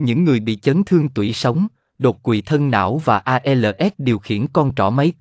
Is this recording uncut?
yes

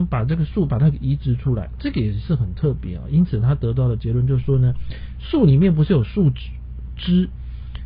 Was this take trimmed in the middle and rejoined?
yes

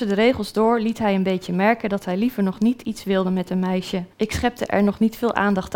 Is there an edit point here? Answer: yes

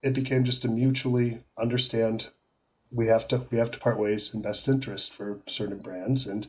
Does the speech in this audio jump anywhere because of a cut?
no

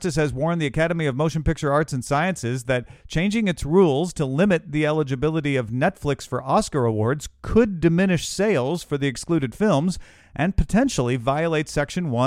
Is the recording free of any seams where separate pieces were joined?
yes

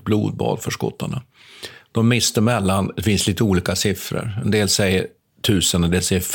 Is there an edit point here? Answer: no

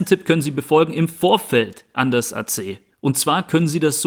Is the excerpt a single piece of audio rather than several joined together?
yes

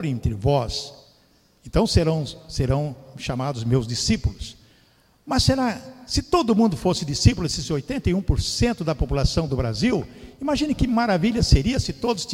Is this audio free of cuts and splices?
yes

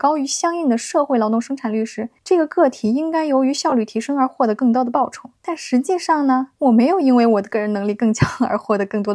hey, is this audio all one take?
no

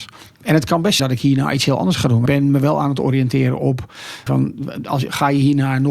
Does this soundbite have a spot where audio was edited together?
yes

